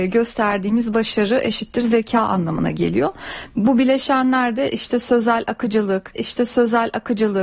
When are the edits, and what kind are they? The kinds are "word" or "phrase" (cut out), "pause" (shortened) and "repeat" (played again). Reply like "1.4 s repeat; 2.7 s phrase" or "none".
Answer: 6.2 s repeat